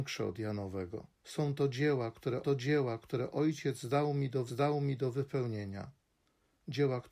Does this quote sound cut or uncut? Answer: cut